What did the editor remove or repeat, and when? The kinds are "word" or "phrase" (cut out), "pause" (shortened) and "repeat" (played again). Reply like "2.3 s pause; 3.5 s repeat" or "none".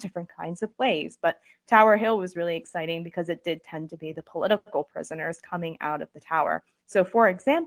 none

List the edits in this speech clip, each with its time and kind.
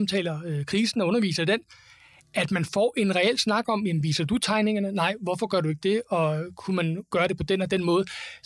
none

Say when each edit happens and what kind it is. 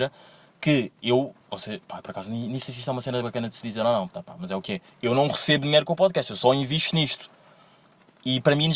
1.4 s pause; 4.9 s pause

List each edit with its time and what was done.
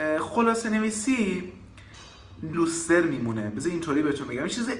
2.5 s phrase

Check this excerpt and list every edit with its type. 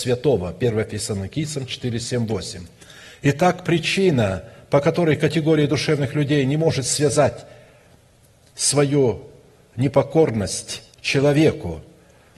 10.9 s pause

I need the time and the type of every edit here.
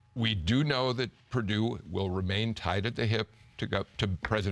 none

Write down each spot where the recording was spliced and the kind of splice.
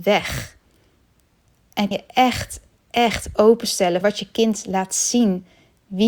1.9 s word; 4.0 s word

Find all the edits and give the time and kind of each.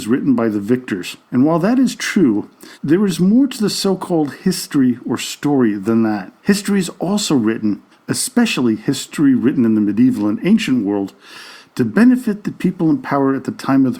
1.2 s pause; 2.7 s pause; 6.4 s pause; 7.9 s pause

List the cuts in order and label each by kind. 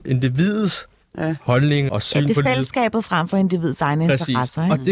1.9 s word

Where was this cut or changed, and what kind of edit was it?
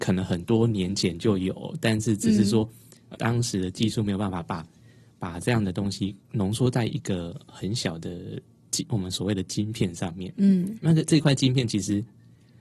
3.1 s word

